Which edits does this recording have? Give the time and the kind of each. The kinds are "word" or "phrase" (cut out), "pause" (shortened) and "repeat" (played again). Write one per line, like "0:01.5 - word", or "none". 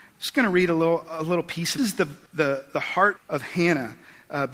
0:01.8 - phrase
0:02.3 - pause
0:03.2 - word